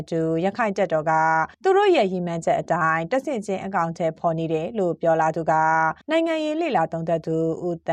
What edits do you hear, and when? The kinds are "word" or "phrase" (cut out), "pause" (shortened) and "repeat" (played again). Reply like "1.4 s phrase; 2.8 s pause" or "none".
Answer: 1.5 s pause; 6.0 s pause